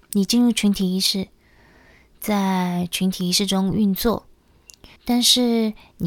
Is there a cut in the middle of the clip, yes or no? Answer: yes